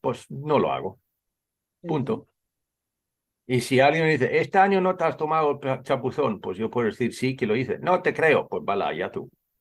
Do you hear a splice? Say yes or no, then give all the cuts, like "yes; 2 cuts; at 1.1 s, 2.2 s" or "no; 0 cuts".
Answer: no; 0 cuts